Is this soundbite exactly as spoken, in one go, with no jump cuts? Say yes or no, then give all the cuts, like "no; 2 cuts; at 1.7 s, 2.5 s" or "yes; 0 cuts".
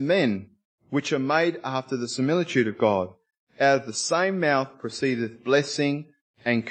yes; 0 cuts